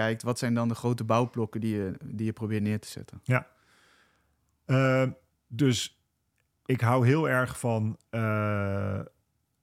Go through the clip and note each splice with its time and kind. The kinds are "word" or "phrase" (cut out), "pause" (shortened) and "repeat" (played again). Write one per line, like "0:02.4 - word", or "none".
0:05.3 - pause